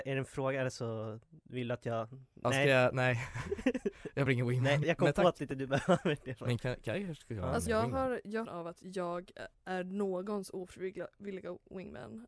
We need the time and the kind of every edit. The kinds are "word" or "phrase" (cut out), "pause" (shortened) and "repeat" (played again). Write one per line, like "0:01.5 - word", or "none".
0:02.3 - pause
0:04.3 - word
0:04.8 - word
0:06.6 - word
0:07.7 - word
0:08.4 - phrase
0:09.5 - pause